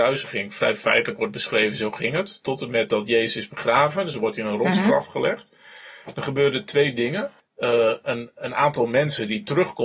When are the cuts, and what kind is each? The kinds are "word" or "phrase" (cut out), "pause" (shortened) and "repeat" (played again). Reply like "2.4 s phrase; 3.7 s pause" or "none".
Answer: 7.4 s pause